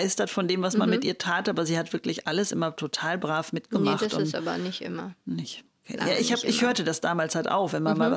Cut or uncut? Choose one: uncut